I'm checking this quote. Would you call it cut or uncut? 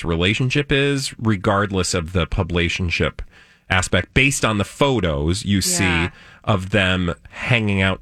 uncut